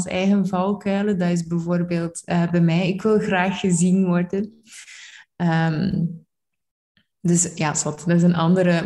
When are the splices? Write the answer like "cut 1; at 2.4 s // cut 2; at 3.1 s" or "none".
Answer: none